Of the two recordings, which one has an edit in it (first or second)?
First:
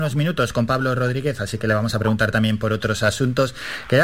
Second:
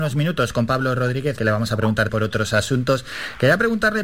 second